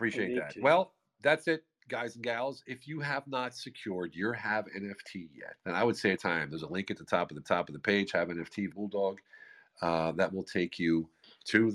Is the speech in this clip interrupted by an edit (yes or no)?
yes